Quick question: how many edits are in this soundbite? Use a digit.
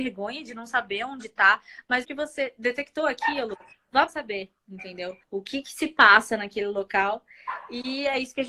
3